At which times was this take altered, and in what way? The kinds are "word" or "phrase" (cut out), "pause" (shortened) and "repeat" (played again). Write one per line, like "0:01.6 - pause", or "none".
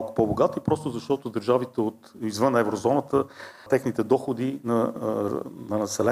none